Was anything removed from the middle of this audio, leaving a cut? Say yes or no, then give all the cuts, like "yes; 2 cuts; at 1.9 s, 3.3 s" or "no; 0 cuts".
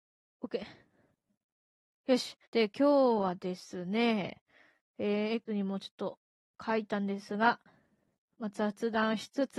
yes; 2 cuts; at 2.4 s, 5.5 s